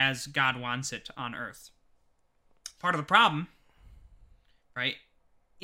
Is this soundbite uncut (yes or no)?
yes